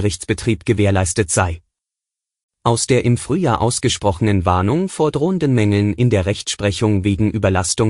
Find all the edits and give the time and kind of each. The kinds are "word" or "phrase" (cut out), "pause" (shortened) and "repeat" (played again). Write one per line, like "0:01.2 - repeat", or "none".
none